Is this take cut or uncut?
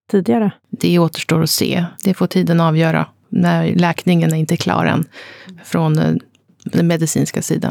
cut